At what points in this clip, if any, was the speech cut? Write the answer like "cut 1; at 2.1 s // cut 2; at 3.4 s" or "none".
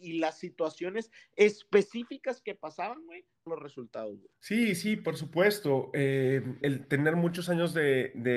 cut 1; at 3.5 s // cut 2; at 4.4 s // cut 3; at 6.6 s